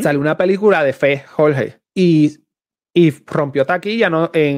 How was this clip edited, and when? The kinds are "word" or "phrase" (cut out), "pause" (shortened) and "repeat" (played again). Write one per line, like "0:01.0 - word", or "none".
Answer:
0:01.9 - pause